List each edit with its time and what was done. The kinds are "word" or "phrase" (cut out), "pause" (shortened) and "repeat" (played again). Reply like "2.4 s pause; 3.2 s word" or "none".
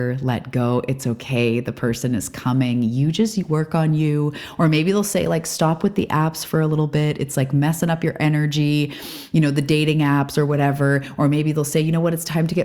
none